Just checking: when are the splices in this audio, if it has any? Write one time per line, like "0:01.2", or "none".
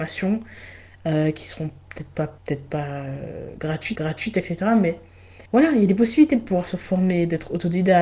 0:02.4
0:04.0
0:05.5